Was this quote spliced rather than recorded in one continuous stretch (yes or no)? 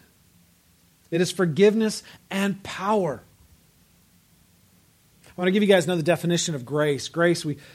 no